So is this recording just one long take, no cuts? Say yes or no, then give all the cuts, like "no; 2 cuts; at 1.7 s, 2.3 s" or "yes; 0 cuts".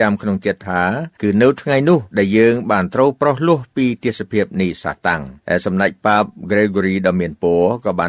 no; 3 cuts; at 1.1 s, 2.1 s, 5.4 s